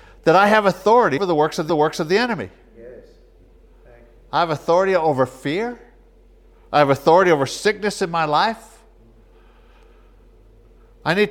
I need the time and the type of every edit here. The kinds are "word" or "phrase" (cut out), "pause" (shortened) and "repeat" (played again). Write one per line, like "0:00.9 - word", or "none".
0:01.2 - word
0:01.7 - repeat